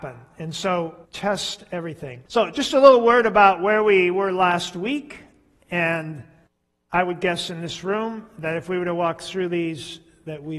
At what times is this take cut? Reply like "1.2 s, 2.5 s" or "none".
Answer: 1.0 s, 2.3 s, 6.5 s